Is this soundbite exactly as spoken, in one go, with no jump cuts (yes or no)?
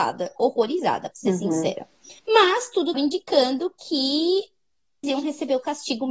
no